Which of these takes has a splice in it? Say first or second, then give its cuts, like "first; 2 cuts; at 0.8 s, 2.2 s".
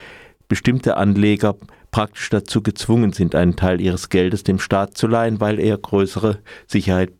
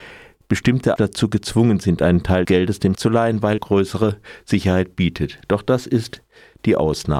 second; 4 cuts; at 1.0 s, 2.4 s, 2.9 s, 3.6 s